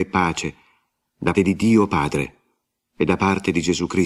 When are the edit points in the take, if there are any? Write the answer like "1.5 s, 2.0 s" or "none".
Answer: 1.3 s